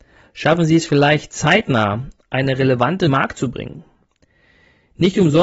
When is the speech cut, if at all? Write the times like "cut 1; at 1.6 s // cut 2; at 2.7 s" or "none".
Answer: cut 1; at 3.1 s